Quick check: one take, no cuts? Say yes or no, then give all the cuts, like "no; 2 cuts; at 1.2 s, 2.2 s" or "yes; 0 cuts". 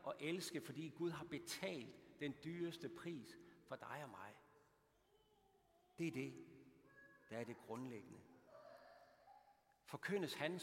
yes; 0 cuts